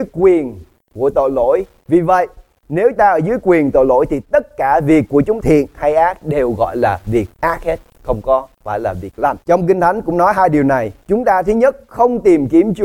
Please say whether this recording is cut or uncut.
cut